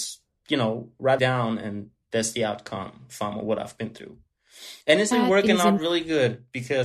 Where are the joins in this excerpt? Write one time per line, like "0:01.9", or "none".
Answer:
0:01.2
0:04.8
0:05.1